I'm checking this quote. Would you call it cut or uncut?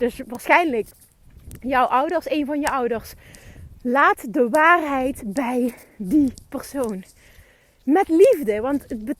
uncut